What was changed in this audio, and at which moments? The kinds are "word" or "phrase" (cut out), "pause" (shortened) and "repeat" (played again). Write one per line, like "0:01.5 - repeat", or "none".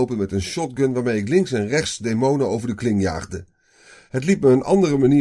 none